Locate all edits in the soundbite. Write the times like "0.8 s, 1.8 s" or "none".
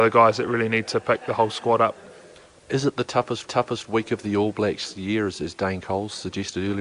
3.5 s